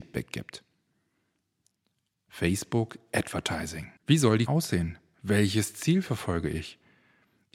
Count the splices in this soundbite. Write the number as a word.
two